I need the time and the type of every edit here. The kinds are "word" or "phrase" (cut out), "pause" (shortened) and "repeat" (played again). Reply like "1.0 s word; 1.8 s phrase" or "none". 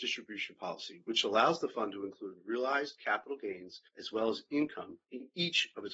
3.9 s pause; 5.0 s pause